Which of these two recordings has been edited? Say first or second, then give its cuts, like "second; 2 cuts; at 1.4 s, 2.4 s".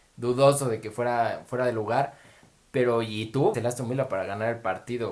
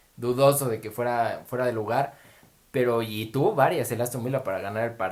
first; 1 cut; at 3.5 s